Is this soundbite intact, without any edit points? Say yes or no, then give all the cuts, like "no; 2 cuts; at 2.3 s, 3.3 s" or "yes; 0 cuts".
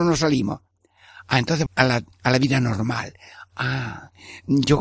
no; 2 cuts; at 1.7 s, 2.1 s